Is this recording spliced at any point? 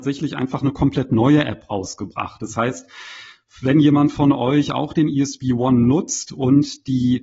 no; 0 cuts

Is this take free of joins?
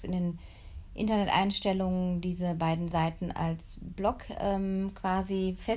yes; 0 cuts

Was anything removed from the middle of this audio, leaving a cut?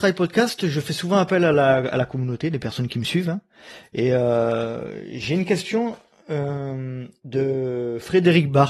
no; 0 cuts

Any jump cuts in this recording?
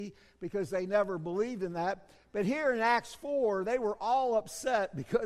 no; 0 cuts

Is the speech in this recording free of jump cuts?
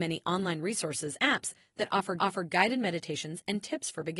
no; 2 cuts; at 1.2 s, 2.2 s

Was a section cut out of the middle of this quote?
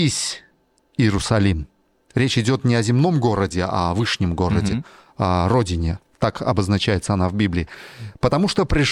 no; 0 cuts

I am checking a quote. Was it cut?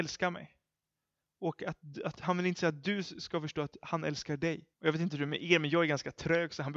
yes; 1 cut; at 4.7 s

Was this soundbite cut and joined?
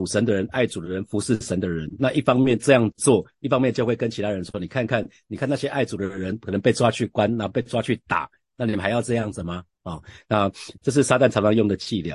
no; 0 cuts

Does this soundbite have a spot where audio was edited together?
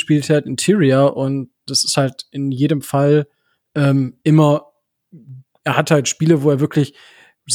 no; 0 cuts

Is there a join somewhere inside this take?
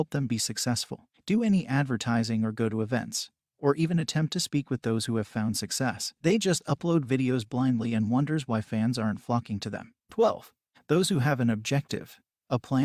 yes; 2 cuts; at 6.2 s, 10.0 s

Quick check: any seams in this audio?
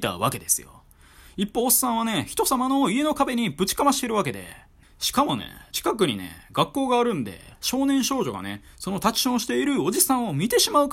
no; 0 cuts

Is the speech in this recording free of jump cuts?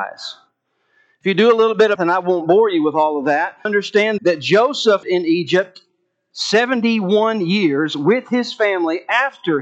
no; 4 cuts; at 2.0 s, 3.7 s, 4.2 s, 5.0 s

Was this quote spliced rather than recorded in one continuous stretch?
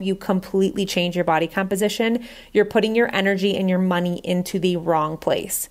no; 0 cuts

